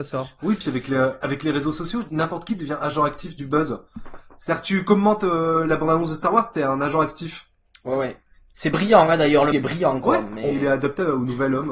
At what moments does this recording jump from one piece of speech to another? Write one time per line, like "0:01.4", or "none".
0:09.5